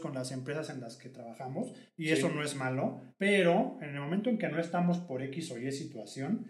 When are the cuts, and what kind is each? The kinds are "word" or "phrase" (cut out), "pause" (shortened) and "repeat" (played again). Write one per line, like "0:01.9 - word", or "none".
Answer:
0:03.1 - pause